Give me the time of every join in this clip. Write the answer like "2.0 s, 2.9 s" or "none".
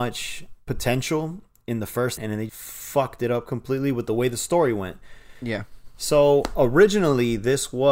2.2 s, 2.5 s